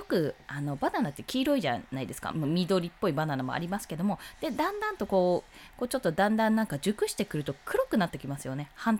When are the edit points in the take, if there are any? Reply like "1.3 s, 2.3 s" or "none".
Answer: 2.3 s